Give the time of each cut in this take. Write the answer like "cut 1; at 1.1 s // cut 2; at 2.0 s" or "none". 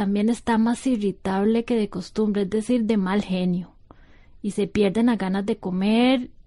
none